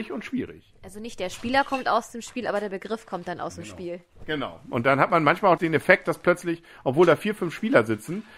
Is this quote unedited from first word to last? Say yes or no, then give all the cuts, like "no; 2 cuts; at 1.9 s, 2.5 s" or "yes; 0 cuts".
no; 1 cut; at 5.6 s